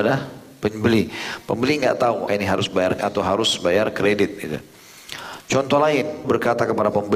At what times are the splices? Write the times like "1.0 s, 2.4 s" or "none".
2.3 s, 3.0 s, 6.2 s